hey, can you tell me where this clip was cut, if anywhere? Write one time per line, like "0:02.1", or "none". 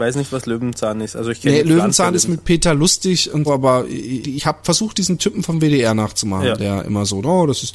0:03.5
0:04.2